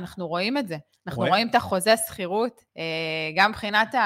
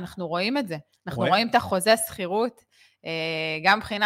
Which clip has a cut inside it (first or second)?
first